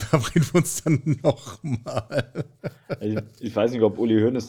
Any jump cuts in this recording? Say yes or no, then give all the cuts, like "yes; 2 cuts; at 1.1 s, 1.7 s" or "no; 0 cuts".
no; 0 cuts